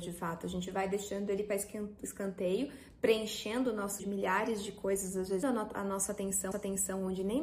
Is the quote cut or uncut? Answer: cut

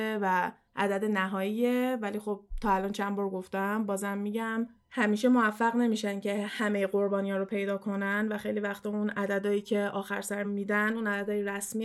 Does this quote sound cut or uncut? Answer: cut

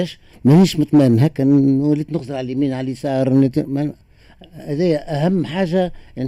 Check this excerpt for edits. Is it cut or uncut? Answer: uncut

